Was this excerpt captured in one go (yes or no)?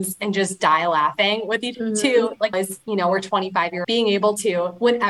no